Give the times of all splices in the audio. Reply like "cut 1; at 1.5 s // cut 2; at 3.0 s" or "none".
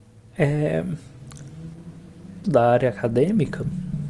cut 1; at 2.4 s